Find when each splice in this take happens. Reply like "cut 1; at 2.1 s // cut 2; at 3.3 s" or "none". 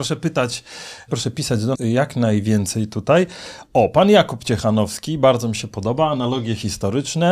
cut 1; at 1.7 s